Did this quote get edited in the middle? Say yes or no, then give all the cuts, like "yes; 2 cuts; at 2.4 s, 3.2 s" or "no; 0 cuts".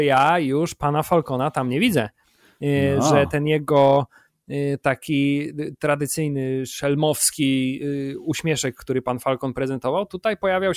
no; 0 cuts